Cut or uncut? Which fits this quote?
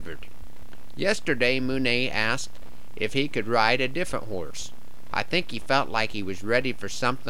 uncut